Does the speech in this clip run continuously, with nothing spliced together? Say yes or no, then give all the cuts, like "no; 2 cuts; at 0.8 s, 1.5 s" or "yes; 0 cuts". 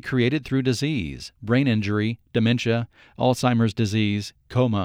yes; 0 cuts